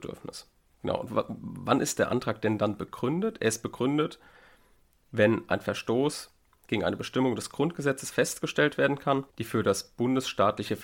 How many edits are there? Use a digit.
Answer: 1